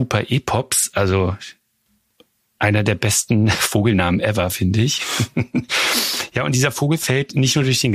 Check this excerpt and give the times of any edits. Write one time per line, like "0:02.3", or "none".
none